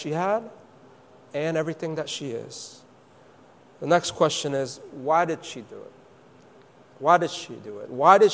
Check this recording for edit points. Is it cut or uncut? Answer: uncut